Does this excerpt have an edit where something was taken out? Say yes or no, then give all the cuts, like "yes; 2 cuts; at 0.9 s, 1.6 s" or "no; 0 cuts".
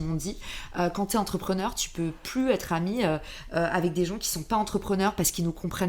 no; 0 cuts